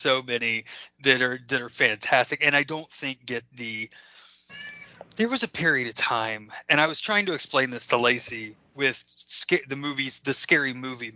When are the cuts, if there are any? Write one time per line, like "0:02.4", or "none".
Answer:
0:08.7

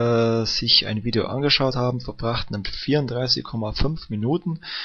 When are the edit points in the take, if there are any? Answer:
0:02.6

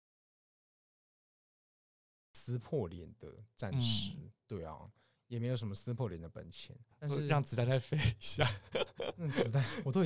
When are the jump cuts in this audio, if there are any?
0:06.9

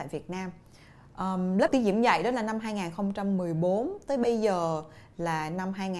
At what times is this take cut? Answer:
0:01.7

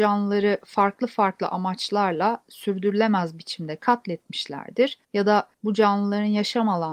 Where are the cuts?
0:05.0
0:05.5

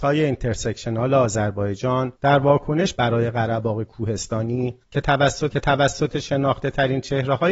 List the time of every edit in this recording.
0:02.2
0:02.9
0:04.8
0:05.5

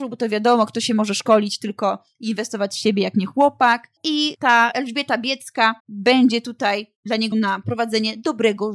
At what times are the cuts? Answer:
0:04.0
0:05.8
0:07.3

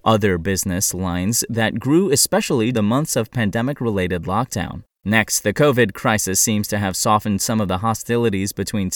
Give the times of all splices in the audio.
0:02.7
0:04.9

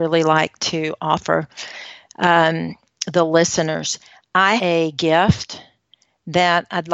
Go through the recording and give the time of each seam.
0:04.6

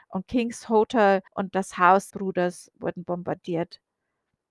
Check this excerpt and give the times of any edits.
0:01.3
0:02.1

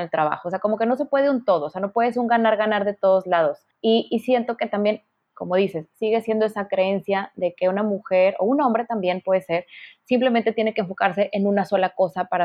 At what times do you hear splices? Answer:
none

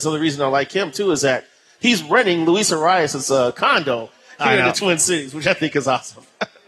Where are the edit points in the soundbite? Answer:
none

